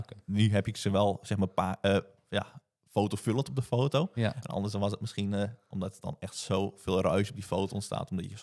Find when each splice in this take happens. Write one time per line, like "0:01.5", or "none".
none